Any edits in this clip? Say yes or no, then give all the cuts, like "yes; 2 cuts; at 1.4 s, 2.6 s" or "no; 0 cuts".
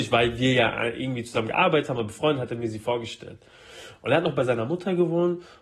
no; 0 cuts